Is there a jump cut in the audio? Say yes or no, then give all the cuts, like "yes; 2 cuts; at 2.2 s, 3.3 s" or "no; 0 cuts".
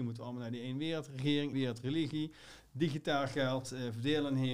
yes; 1 cut; at 1.5 s